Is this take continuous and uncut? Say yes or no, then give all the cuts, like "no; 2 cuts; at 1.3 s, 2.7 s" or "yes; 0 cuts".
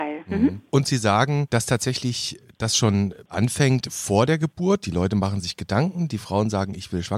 yes; 0 cuts